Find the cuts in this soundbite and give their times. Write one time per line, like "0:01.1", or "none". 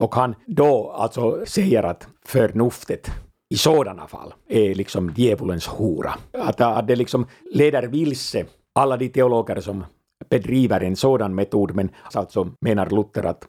0:01.4
0:12.1
0:12.6

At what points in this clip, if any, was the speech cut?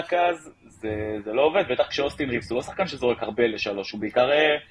none

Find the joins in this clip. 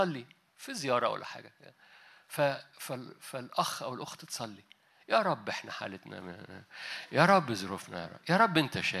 none

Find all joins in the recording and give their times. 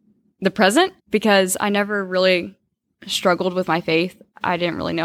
0:01.0

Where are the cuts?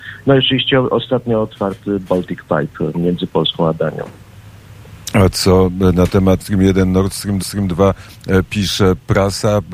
0:06.4
0:07.4

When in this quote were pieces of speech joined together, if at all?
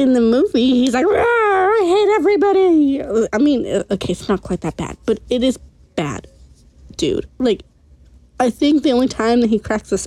none

